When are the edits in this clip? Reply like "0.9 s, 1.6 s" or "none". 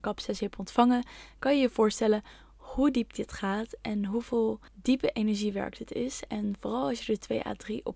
4.7 s